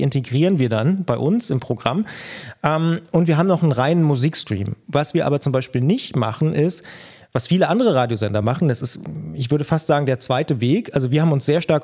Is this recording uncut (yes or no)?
yes